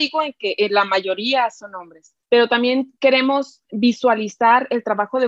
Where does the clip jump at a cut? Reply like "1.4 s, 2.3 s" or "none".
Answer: 2.2 s